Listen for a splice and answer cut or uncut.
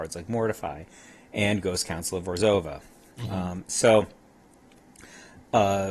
uncut